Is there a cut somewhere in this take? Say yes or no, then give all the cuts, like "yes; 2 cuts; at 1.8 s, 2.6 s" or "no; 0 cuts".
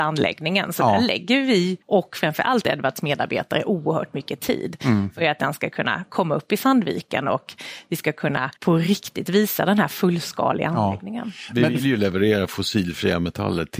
yes; 2 cuts; at 1.8 s, 8.6 s